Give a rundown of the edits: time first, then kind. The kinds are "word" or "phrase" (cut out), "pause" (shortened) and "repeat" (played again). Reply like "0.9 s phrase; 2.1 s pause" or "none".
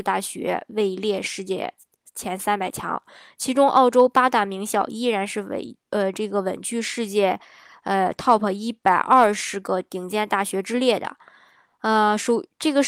none